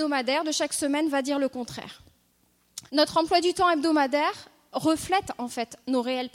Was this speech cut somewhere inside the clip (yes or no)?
yes